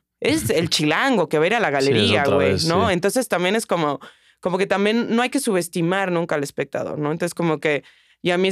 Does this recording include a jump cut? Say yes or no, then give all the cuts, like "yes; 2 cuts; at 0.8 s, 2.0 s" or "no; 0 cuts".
no; 0 cuts